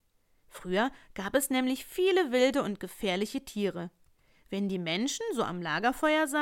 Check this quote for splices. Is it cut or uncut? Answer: uncut